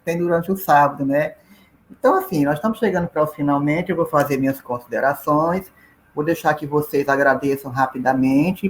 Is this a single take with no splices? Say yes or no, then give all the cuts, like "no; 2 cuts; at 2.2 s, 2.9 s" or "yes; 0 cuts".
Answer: yes; 0 cuts